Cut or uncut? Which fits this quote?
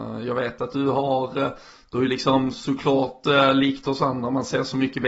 uncut